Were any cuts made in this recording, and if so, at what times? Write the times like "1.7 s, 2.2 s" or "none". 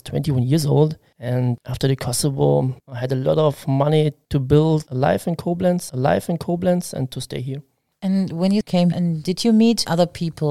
2.8 s, 5.9 s, 8.9 s